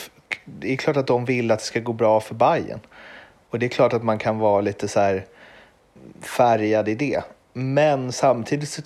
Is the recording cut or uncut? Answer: uncut